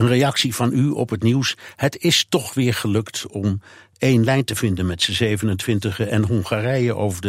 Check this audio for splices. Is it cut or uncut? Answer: uncut